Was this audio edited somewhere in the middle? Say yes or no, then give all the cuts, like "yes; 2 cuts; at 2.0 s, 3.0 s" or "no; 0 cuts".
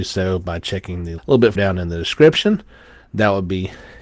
yes; 2 cuts; at 1.2 s, 1.5 s